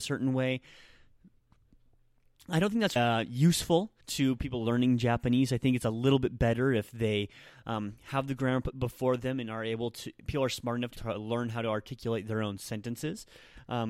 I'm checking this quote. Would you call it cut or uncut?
cut